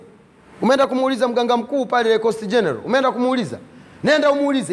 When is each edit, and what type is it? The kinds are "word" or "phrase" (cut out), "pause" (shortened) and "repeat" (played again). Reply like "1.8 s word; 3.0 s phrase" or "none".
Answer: none